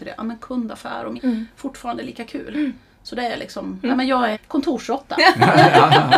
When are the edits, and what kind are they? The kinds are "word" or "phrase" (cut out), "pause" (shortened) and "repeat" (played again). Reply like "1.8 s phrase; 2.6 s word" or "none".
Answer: 1.2 s word; 4.3 s word